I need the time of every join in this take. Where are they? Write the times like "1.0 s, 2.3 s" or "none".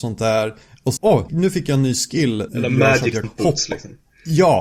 1.0 s, 1.3 s, 2.5 s, 3.2 s